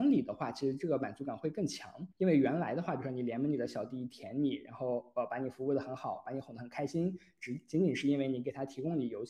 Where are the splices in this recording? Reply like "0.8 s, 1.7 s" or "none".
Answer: 2.1 s